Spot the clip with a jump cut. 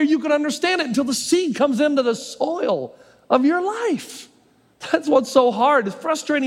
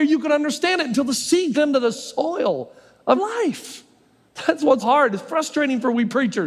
second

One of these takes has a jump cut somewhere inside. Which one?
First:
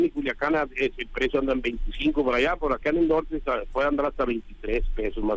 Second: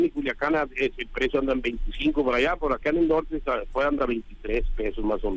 second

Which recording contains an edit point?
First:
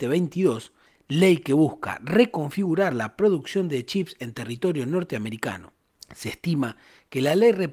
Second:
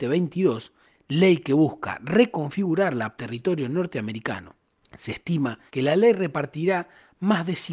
second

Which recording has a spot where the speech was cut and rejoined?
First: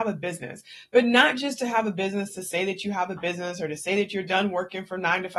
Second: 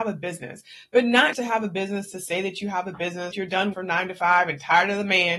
second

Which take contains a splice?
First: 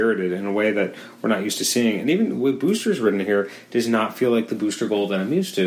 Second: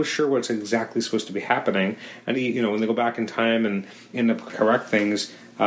second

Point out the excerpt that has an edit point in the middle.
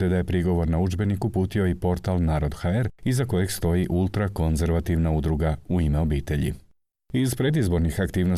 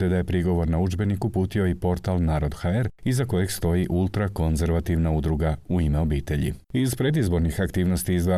second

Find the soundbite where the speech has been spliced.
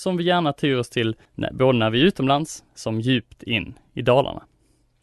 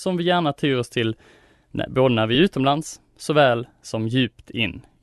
first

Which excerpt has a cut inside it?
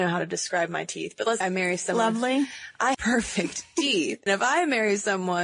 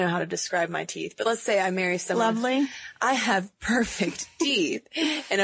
first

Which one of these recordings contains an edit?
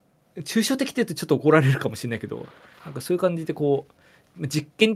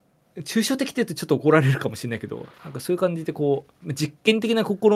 second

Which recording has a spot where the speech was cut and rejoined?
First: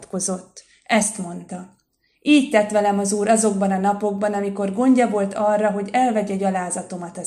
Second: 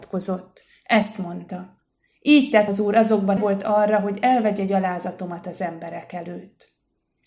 second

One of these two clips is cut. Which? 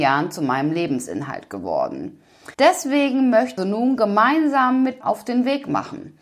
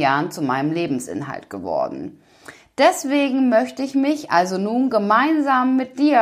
first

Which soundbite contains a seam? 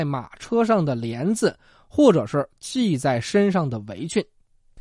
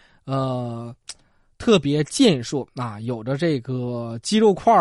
second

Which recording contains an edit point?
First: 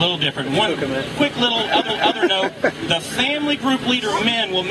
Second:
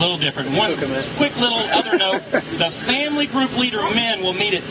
first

